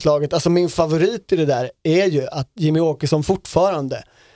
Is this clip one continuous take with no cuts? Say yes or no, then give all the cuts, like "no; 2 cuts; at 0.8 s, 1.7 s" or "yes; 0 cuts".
yes; 0 cuts